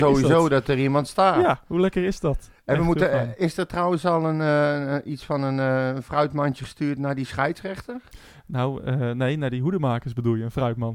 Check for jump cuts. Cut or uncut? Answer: uncut